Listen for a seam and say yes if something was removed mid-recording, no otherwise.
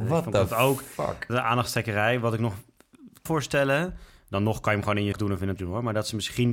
yes